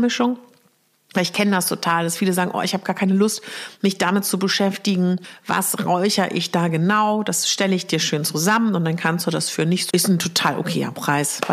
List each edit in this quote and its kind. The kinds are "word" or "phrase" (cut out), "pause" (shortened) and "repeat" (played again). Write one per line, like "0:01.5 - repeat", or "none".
0:09.9 - word